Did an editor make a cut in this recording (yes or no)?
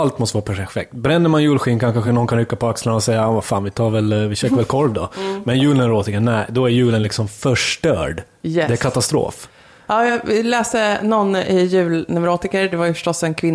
no